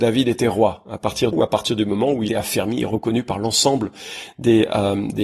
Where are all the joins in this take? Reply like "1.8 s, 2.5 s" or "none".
1.3 s, 2.3 s

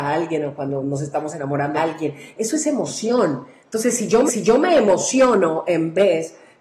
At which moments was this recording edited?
1.7 s, 4.3 s

